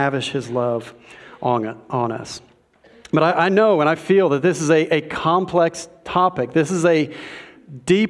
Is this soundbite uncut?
yes; 0 cuts

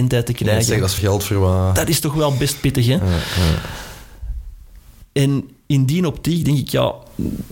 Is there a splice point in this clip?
yes; 1 cut; at 1.0 s

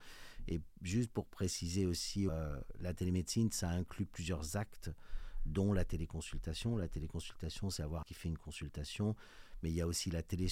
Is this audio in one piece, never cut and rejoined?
no; 2 cuts; at 2.3 s, 8.0 s

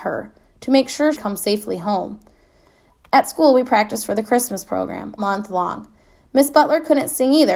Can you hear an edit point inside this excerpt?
yes; 2 cuts; at 1.1 s, 5.2 s

